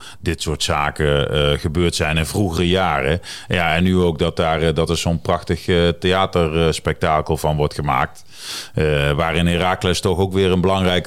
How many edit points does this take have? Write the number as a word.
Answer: zero